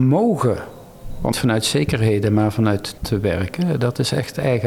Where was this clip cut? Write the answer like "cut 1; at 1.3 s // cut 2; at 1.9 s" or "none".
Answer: cut 1; at 1.3 s // cut 2; at 3.0 s